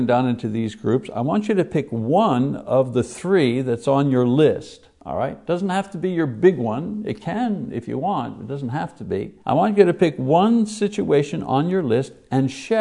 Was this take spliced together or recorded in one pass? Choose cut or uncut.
cut